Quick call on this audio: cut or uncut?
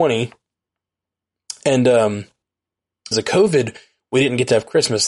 cut